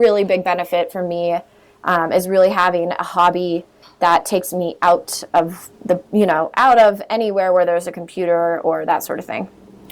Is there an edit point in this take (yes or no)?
yes